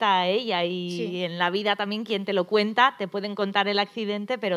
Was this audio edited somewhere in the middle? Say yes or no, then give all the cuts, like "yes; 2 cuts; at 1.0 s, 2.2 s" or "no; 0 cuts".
no; 0 cuts